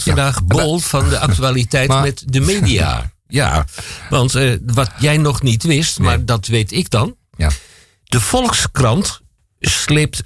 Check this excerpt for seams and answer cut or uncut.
uncut